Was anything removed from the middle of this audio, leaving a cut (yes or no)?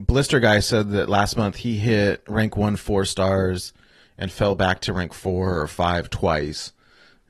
no